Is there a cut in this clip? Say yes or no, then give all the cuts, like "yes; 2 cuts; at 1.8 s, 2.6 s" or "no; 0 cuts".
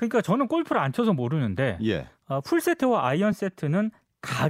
no; 0 cuts